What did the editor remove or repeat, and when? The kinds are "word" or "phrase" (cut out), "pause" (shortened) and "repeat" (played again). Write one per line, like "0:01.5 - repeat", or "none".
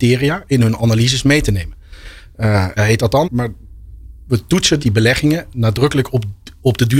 0:02.8 - word
0:03.2 - word
0:04.8 - word